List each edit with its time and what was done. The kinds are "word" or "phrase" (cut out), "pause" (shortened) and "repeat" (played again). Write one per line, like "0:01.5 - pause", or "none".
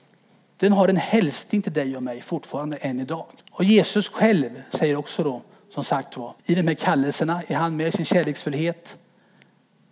0:03.4 - pause
0:06.4 - pause